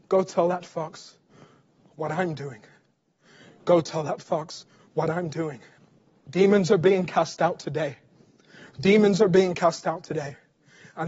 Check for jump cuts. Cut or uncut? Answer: cut